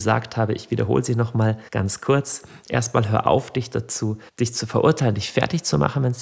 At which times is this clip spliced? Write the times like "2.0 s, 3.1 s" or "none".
1.7 s, 4.3 s